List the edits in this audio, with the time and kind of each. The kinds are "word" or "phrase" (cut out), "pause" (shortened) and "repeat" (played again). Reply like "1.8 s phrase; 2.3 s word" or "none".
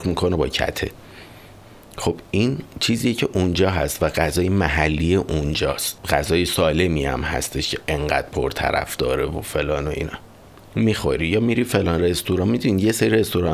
2.7 s pause